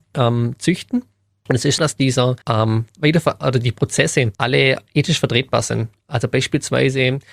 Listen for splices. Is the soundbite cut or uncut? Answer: cut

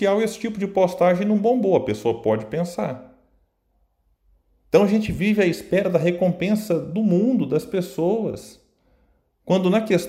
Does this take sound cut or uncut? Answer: uncut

